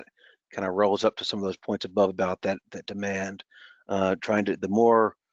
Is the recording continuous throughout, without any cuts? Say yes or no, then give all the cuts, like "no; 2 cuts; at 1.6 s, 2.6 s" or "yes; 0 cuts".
yes; 0 cuts